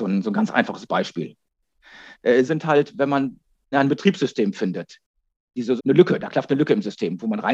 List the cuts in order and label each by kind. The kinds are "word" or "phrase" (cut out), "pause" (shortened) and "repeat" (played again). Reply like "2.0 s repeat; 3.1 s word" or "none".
2.5 s word; 3.7 s word; 5.8 s word